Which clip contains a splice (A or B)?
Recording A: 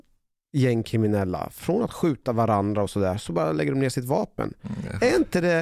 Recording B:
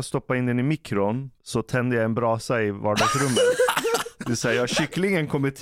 B